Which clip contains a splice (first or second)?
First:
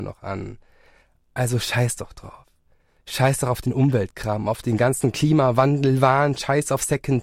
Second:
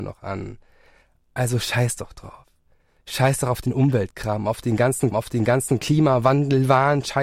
second